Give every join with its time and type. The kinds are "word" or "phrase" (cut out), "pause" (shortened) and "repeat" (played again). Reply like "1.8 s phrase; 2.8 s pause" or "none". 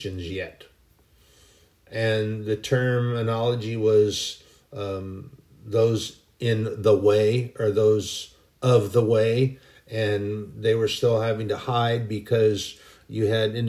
none